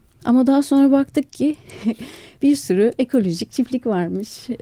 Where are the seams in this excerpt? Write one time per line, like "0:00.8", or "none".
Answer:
none